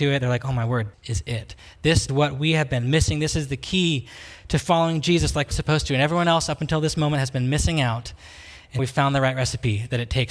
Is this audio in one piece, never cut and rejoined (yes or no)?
no